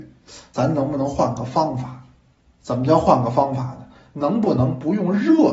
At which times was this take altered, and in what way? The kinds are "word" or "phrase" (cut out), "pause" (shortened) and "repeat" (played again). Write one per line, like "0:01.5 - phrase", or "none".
none